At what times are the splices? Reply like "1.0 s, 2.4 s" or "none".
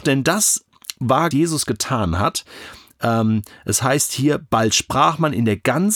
1.3 s